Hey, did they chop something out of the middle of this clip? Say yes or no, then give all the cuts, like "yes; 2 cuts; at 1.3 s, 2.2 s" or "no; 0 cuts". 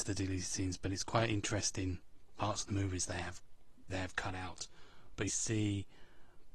yes; 2 cuts; at 3.9 s, 5.3 s